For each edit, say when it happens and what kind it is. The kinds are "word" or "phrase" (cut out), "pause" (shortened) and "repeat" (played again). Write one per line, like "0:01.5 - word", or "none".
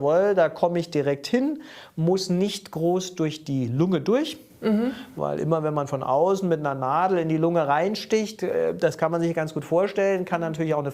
none